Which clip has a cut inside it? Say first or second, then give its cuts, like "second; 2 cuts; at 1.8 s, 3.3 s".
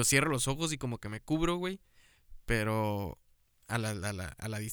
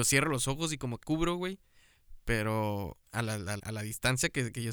second; 3 cuts; at 1.0 s, 3.0 s, 3.6 s